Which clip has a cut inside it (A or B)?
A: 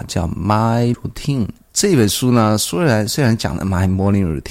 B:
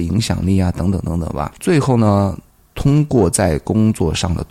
A